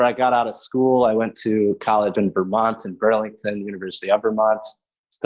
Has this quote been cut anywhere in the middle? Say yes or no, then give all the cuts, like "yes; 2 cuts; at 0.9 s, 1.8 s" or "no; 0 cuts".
yes; 1 cut; at 2.1 s